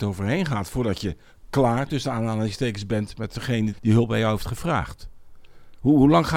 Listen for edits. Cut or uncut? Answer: cut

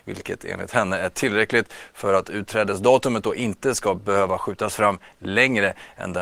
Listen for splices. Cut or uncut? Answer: uncut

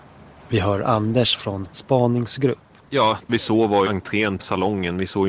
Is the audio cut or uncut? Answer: cut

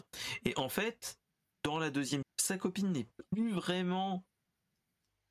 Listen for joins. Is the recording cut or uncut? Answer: cut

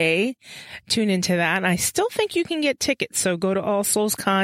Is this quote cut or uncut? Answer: uncut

